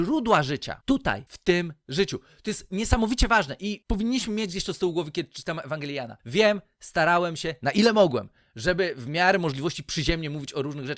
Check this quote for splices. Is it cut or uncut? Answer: uncut